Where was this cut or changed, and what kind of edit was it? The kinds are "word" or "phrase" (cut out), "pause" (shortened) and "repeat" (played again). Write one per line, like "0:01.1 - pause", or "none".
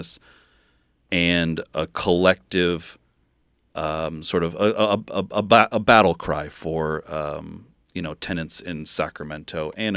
none